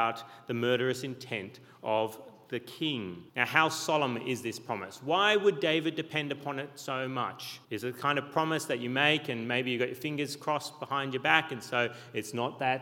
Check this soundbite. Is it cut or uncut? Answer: cut